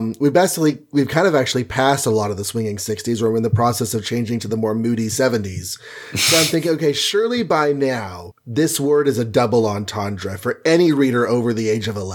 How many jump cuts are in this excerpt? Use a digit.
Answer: 0